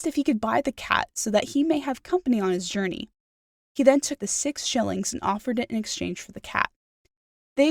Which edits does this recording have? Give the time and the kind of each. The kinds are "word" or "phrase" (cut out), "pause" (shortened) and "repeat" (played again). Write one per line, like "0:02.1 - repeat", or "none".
0:04.2 - phrase